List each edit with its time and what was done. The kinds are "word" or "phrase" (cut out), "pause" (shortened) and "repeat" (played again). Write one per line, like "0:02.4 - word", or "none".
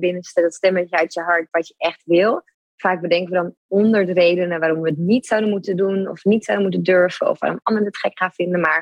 none